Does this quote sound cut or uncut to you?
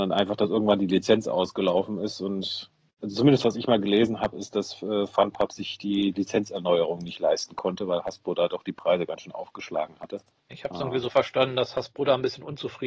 uncut